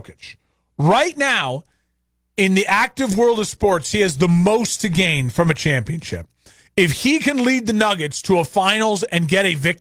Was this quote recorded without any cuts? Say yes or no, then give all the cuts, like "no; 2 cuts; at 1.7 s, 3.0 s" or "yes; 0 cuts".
yes; 0 cuts